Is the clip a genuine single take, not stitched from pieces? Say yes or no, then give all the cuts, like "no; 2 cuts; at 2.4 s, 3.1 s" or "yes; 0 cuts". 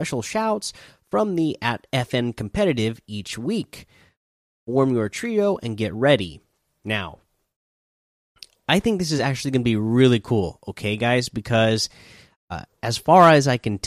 yes; 0 cuts